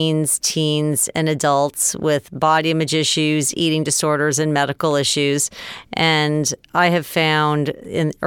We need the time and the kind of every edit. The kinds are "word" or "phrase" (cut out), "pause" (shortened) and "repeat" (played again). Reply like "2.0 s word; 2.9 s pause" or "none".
none